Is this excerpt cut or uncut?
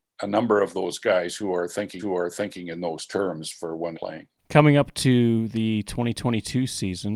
cut